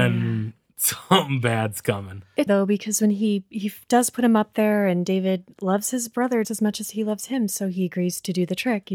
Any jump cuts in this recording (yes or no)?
yes